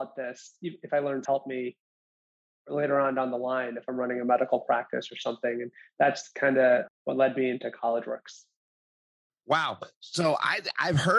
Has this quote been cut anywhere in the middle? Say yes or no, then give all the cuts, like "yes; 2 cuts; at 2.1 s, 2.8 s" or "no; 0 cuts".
yes; 2 cuts; at 1.3 s, 6.9 s